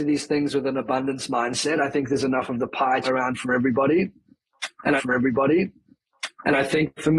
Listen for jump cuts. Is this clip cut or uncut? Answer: cut